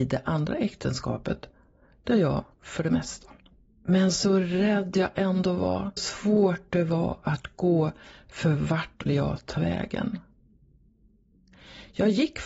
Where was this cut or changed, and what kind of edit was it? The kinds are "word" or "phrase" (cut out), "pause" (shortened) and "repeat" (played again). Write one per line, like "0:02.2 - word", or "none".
0:02.6 - word
0:06.0 - word
0:09.1 - word

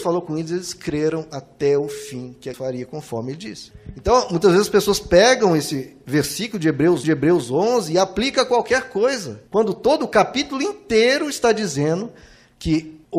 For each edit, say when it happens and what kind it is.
0:02.5 - word
0:07.0 - repeat
0:09.5 - pause

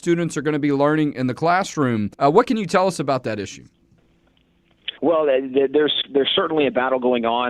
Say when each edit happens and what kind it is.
0:02.1 - pause
0:05.0 - pause

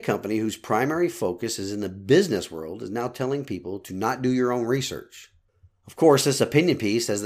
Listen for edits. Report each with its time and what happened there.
0:05.5 - pause

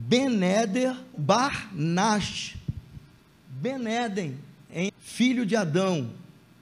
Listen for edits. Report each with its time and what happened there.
0:01.1 - word
0:04.9 - word

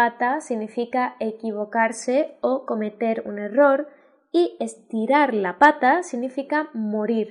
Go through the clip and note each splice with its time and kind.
none

